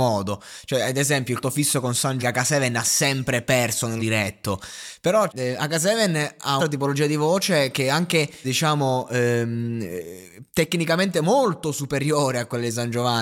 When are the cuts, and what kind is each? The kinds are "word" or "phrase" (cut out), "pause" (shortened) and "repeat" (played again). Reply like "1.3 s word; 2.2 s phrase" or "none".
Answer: 1.4 s word; 2.2 s word; 4.0 s word; 5.3 s word; 6.6 s word; 8.4 s word